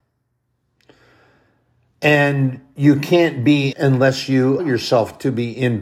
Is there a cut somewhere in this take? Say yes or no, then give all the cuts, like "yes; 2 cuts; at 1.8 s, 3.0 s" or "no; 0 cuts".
yes; 2 cuts; at 3.7 s, 4.6 s